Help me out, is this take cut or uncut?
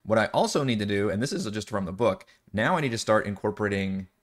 uncut